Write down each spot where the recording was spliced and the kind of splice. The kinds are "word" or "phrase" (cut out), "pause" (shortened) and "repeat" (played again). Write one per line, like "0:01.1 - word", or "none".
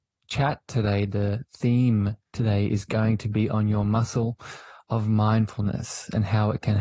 0:02.2 - pause